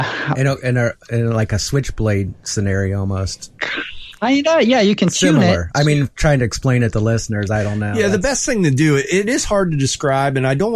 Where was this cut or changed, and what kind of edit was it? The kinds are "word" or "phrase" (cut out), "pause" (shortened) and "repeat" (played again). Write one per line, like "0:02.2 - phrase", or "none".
none